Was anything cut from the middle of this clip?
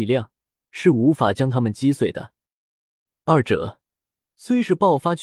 no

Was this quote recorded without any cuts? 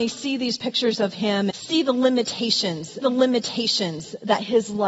no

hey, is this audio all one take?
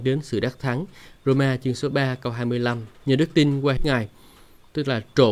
no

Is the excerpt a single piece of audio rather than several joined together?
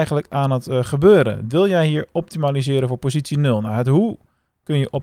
yes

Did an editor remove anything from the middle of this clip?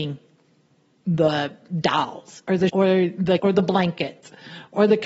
yes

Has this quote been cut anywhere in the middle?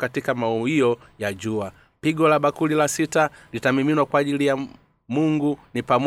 no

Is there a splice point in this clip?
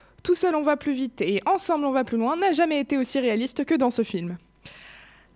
no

